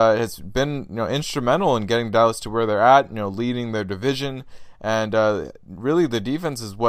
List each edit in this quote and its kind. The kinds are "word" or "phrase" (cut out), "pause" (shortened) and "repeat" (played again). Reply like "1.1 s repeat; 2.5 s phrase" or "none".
none